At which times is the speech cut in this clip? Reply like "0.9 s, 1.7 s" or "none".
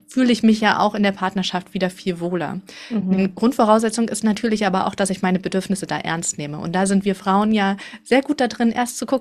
none

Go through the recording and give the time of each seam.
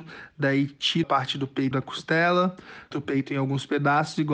1.0 s, 1.7 s, 2.9 s

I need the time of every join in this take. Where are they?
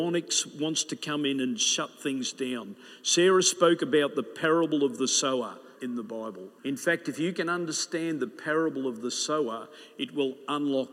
5.7 s, 6.6 s

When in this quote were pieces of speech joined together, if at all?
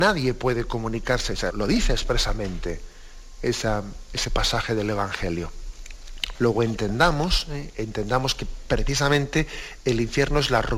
1.5 s, 6.3 s

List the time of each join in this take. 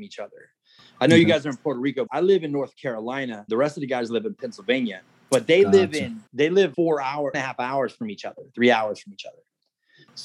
2.1 s, 3.5 s, 5.1 s, 6.3 s, 6.7 s, 7.3 s

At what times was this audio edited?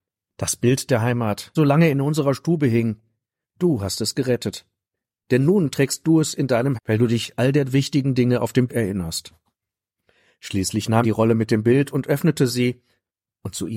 1.6 s, 6.8 s, 8.7 s, 11.0 s

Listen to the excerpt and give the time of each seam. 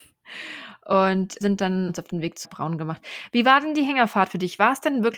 1.4 s, 1.9 s, 2.4 s

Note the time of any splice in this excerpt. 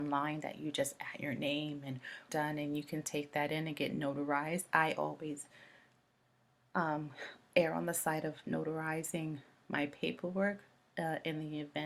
2.3 s

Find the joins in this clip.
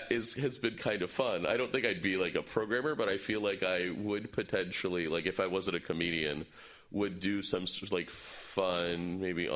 none

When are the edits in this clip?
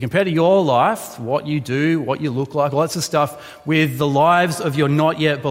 none

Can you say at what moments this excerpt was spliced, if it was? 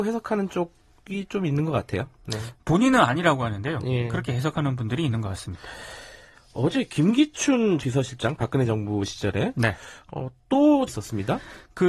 7.8 s, 10.9 s

